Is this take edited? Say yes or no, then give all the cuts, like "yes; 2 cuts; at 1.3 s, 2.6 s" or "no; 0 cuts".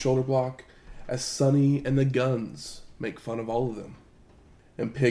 no; 0 cuts